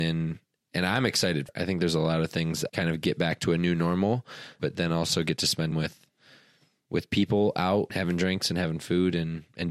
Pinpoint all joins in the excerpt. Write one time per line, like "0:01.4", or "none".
0:01.5
0:02.7
0:04.6
0:05.7
0:07.9